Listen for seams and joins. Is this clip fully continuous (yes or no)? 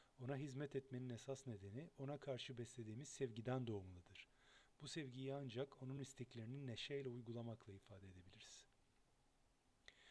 yes